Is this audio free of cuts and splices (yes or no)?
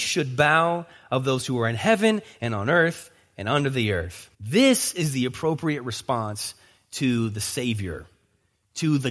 no